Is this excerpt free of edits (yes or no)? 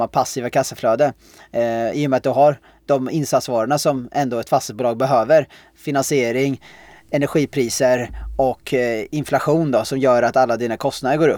yes